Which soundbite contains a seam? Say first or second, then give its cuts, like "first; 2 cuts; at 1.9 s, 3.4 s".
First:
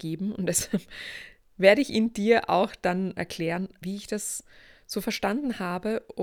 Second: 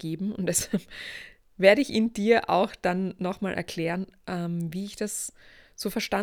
first; 2 cuts; at 3.2 s, 3.8 s